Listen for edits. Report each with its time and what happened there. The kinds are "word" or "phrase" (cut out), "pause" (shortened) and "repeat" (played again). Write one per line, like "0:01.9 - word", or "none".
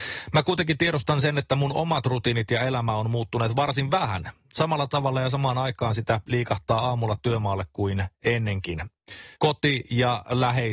0:09.3 - pause